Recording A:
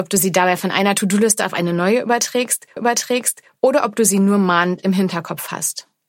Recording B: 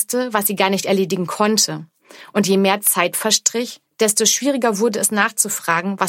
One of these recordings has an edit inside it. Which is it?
A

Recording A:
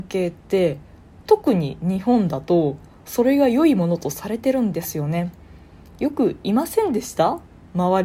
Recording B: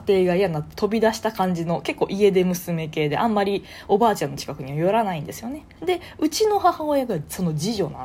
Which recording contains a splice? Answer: B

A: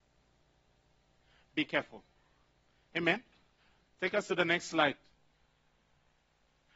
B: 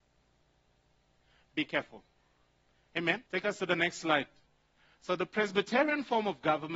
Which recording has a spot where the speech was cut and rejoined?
B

